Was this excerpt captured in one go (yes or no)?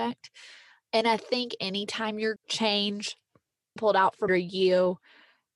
no